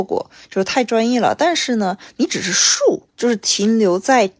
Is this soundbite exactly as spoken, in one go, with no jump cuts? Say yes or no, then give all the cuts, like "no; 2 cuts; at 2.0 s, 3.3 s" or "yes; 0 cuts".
no; 1 cut; at 3.1 s